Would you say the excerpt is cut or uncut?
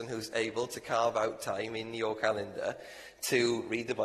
uncut